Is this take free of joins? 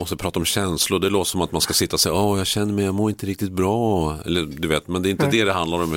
yes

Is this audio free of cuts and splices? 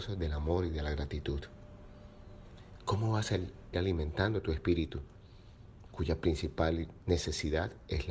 no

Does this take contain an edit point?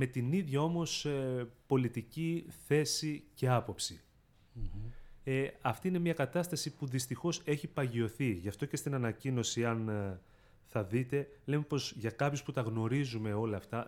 no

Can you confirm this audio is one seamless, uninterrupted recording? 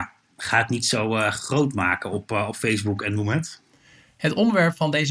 yes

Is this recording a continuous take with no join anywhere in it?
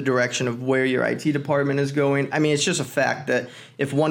yes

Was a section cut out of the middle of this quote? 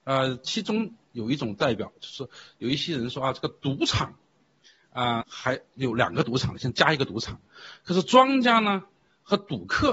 yes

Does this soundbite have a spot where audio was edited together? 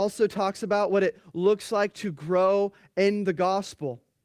no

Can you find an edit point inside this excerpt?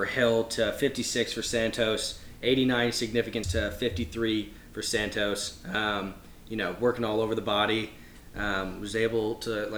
yes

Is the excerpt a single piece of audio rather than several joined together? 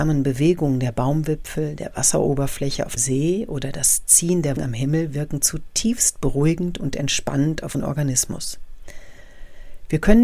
no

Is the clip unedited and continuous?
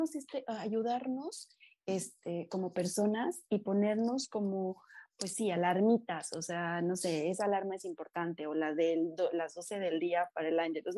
yes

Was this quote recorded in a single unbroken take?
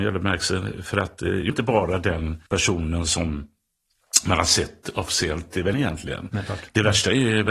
no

